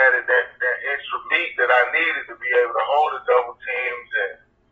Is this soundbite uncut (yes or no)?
yes